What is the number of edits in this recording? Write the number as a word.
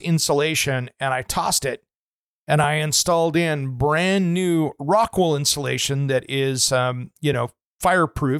zero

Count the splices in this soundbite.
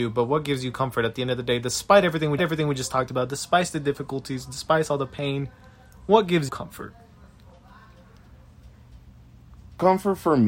two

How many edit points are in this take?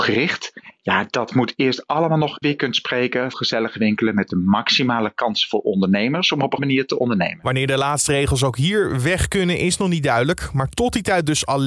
three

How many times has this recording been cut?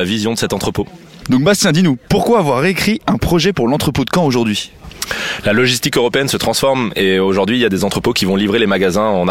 zero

